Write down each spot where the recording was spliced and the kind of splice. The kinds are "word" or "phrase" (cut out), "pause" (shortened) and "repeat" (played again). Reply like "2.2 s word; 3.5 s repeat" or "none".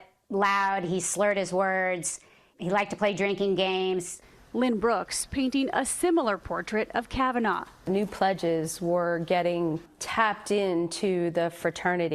none